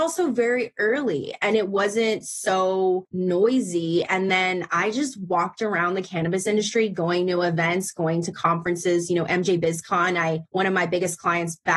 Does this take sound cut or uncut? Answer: uncut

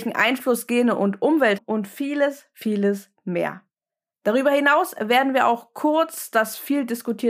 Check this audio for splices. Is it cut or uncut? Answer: cut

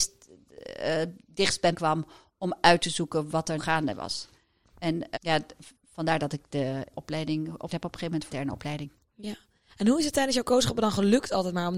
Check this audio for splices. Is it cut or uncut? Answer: cut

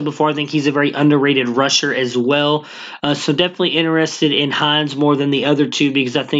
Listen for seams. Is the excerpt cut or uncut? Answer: uncut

